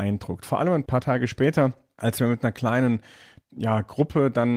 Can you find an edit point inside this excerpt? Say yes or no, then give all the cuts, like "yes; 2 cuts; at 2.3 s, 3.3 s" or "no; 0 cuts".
no; 0 cuts